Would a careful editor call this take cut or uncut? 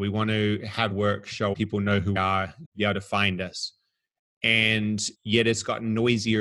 cut